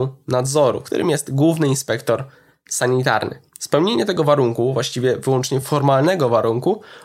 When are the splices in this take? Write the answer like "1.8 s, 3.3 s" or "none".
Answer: none